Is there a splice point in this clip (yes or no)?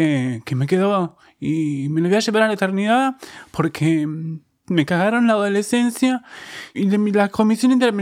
yes